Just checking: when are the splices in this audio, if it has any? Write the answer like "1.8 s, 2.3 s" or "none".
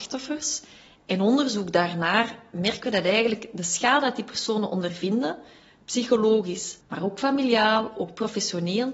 6.8 s